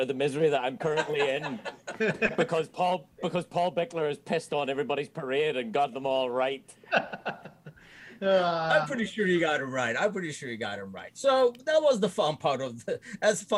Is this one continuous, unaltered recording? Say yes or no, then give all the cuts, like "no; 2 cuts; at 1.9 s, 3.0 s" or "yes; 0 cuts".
yes; 0 cuts